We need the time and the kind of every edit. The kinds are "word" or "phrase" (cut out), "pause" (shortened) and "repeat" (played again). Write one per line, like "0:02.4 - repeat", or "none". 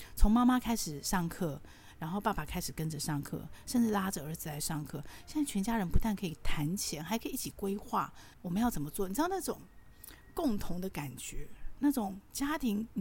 0:08.3 - pause